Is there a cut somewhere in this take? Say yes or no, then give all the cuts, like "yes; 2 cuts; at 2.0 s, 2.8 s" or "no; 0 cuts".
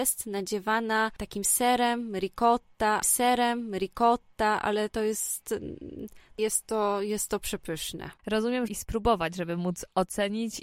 yes; 3 cuts; at 3.0 s, 6.4 s, 8.7 s